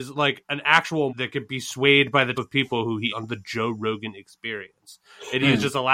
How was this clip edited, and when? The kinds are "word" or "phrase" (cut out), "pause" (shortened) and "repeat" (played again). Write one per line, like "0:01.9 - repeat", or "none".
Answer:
0:01.1 - word
0:02.3 - word
0:03.1 - word